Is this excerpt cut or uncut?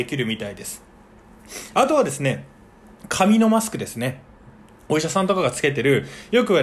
uncut